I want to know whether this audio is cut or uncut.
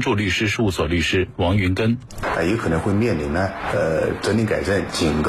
uncut